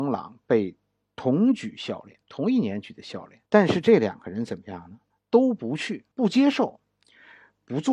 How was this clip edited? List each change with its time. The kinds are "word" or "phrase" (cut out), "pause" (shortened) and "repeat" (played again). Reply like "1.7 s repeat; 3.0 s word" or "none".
2.2 s pause; 3.5 s pause; 5.2 s pause; 6.1 s pause